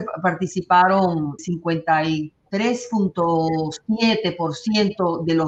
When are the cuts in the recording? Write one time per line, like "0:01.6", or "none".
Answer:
0:01.4